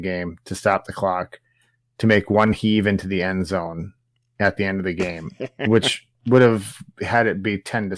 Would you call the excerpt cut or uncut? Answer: uncut